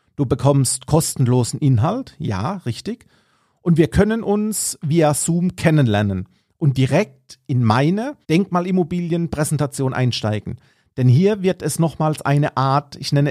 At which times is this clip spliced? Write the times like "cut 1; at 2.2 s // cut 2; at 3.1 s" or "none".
cut 1; at 8.2 s